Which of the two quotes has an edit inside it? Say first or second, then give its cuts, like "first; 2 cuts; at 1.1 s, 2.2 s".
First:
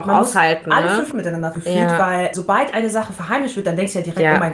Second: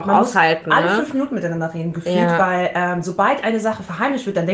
first; 3 cuts; at 1.1 s, 1.5 s, 2.3 s